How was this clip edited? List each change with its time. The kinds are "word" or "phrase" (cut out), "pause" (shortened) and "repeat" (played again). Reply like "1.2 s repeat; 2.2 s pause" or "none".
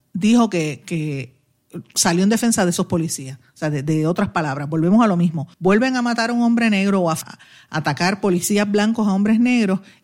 5.5 s pause; 7.2 s word